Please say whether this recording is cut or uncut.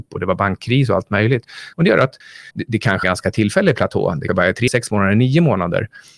cut